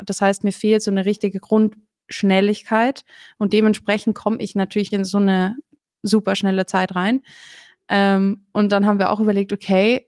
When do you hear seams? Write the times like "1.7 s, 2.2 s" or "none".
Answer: 4.9 s